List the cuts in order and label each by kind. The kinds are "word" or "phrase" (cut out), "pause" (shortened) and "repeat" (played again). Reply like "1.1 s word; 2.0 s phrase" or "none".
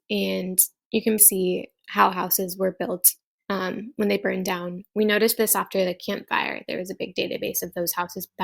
1.2 s word